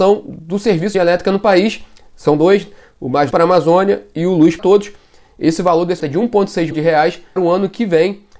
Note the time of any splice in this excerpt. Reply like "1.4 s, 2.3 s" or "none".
0.9 s, 3.3 s, 4.6 s, 6.0 s, 6.7 s, 7.4 s